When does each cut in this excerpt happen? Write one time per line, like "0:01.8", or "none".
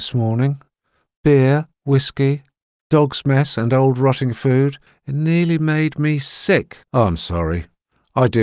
0:01.7
0:04.9
0:06.8